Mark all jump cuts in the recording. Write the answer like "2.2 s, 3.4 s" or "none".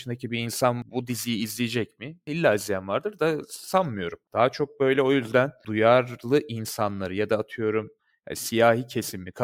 none